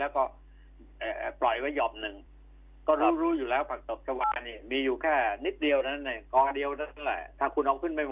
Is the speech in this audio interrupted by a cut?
no; 0 cuts

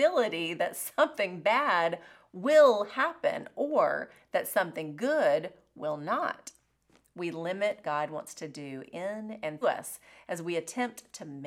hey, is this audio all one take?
no; 2 cuts; at 7.8 s, 9.6 s

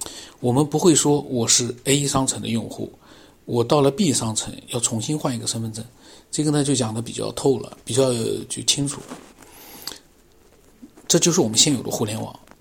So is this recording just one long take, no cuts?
yes; 0 cuts

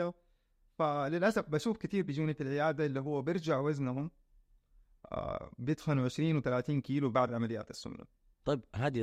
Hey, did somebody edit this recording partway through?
no; 0 cuts

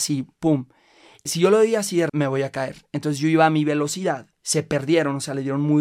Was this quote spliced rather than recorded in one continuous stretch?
yes; 3 cuts; at 1.3 s, 2.1 s, 4.3 s

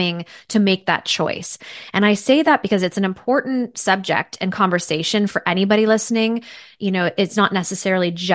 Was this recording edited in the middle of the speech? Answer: no; 0 cuts

